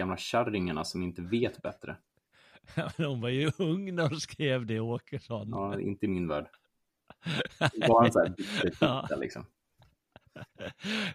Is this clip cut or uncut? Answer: uncut